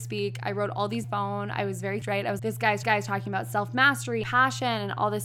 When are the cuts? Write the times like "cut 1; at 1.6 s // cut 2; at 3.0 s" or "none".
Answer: cut 1; at 1.0 s // cut 2; at 2.0 s // cut 3; at 2.4 s // cut 4; at 2.8 s // cut 5; at 4.2 s